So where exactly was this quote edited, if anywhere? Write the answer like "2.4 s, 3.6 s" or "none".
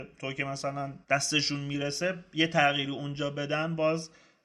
1.0 s

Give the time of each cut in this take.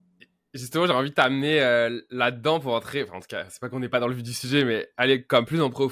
none

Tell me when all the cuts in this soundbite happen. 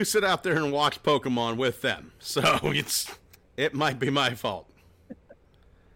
3.3 s

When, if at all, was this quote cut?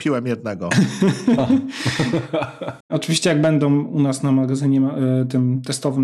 2.8 s

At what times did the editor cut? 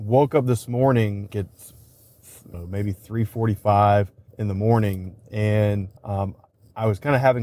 1.3 s, 2.5 s, 4.3 s, 6.0 s

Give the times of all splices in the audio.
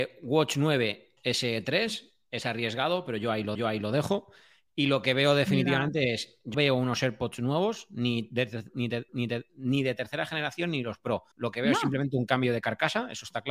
1.2 s, 3.5 s, 6.5 s, 9.1 s, 11.3 s

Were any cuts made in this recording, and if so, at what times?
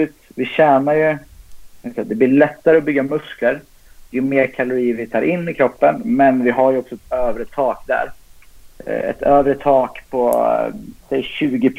8.7 s

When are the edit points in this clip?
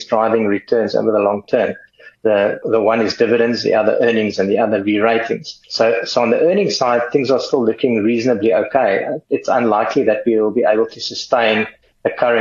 none

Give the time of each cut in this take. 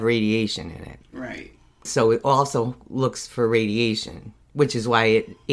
1.0 s

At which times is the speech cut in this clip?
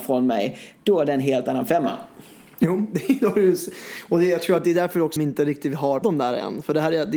5.2 s, 6.0 s

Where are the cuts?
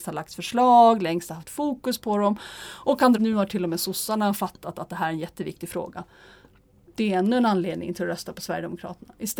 3.1 s

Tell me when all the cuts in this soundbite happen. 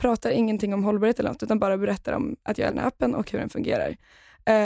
2.7 s

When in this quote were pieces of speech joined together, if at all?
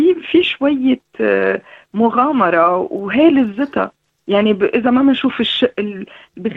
none

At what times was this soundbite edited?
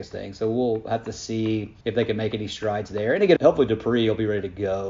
1.8 s, 3.4 s

